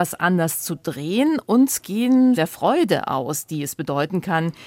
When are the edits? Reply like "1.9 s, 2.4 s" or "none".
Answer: 2.4 s